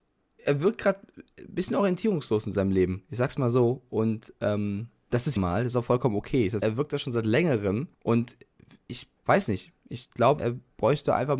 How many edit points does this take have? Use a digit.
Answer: 5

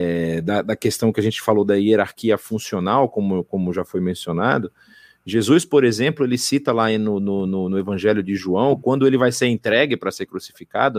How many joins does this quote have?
0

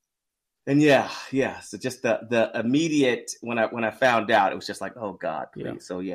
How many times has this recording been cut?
0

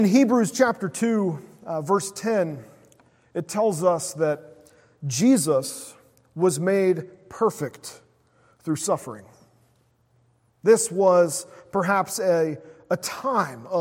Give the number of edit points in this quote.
0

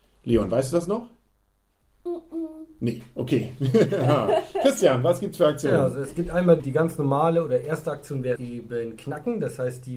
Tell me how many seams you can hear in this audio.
2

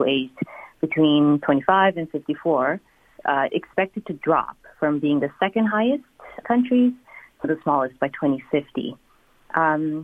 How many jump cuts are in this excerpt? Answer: 3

